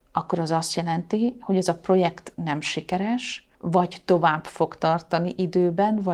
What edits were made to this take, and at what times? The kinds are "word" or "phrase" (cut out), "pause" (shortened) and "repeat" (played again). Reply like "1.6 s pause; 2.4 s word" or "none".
3.5 s pause